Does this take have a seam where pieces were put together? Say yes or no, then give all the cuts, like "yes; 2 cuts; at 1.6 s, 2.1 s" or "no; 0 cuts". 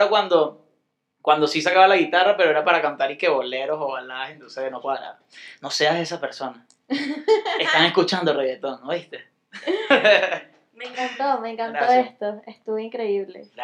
no; 0 cuts